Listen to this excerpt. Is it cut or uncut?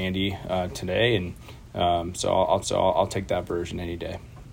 cut